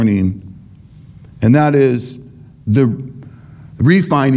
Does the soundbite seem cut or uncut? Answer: uncut